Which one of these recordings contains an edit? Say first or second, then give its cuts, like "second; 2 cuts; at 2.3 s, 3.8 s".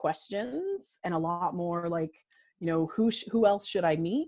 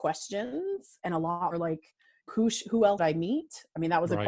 second; 3 cuts; at 1.5 s, 2.3 s, 3.0 s